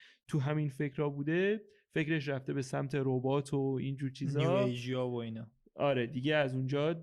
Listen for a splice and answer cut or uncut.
uncut